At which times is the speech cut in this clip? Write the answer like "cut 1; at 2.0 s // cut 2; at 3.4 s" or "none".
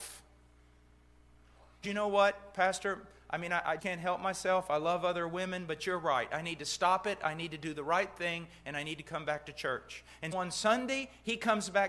cut 1; at 1.8 s // cut 2; at 3.8 s // cut 3; at 10.3 s